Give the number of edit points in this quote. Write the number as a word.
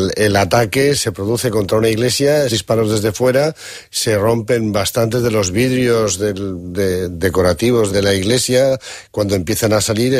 three